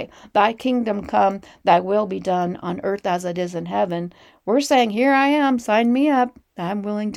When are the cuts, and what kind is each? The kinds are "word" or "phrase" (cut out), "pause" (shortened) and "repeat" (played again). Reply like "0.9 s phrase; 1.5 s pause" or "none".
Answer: none